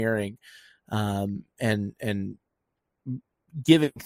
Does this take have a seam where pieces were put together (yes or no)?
no